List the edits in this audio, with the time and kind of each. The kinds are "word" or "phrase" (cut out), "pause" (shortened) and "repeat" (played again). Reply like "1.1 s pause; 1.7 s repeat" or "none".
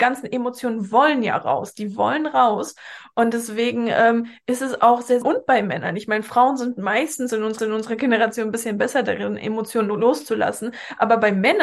5.2 s phrase; 7.6 s repeat